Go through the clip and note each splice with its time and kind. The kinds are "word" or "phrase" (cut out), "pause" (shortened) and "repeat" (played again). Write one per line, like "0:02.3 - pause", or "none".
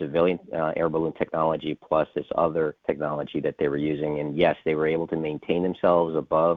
0:02.8 - pause